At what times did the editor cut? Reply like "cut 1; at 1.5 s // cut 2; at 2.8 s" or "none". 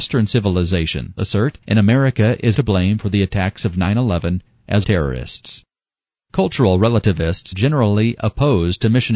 cut 1; at 1.2 s // cut 2; at 1.6 s // cut 3; at 2.5 s // cut 4; at 4.8 s // cut 5; at 7.5 s